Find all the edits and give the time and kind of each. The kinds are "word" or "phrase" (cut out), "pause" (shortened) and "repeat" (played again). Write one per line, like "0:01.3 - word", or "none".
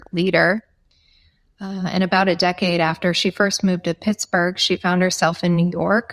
none